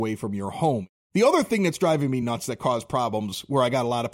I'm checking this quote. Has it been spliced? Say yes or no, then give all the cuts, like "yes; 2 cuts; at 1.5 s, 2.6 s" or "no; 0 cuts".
no; 0 cuts